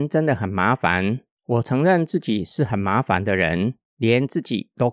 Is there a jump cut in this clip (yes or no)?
yes